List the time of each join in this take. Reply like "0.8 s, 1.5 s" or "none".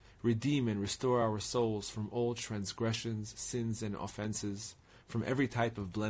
none

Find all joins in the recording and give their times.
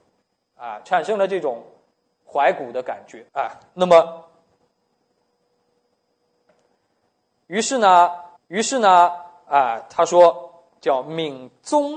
3.3 s, 8.4 s

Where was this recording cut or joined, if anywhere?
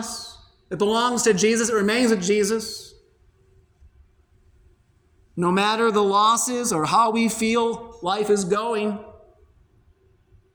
none

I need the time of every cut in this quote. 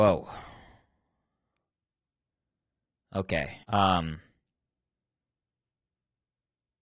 3.6 s

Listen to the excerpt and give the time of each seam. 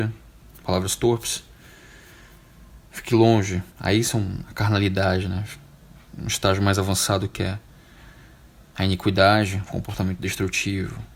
3.7 s

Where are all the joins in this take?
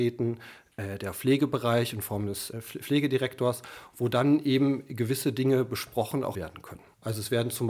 2.5 s, 6.3 s

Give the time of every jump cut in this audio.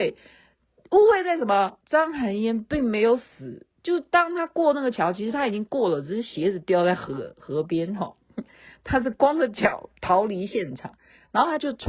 1.8 s, 3.7 s

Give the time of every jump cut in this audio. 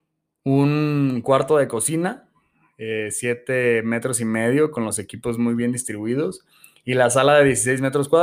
none

